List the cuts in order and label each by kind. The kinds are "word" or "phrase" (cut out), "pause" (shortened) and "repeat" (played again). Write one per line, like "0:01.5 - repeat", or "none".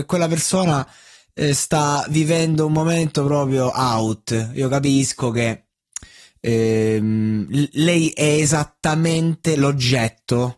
none